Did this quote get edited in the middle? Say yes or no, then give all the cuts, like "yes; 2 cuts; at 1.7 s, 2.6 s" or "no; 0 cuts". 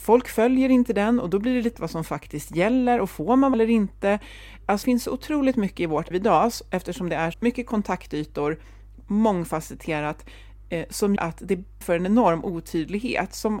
yes; 7 cuts; at 1.7 s, 3.5 s, 4.8 s, 6.1 s, 7.3 s, 11.2 s, 11.8 s